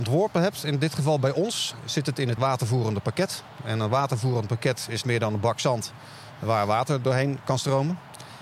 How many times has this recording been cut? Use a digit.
2